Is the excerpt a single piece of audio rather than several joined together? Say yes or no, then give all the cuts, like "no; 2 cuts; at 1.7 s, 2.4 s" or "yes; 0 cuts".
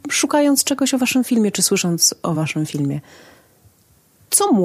yes; 0 cuts